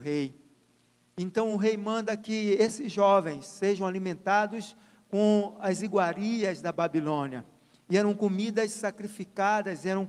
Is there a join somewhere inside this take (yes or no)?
no